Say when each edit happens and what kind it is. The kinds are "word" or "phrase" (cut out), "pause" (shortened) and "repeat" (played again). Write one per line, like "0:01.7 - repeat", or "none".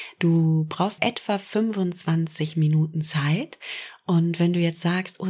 0:01.0 - word